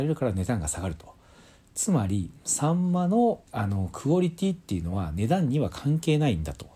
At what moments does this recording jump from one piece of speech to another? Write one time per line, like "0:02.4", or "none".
0:03.5